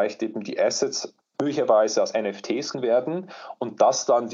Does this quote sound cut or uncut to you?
cut